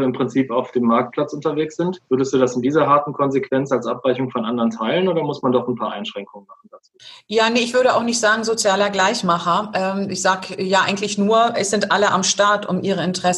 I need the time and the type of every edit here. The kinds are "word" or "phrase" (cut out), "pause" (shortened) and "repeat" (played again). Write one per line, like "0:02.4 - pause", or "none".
0:02.1 - pause